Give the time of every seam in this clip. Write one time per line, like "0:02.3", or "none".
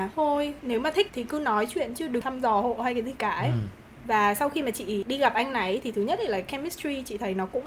none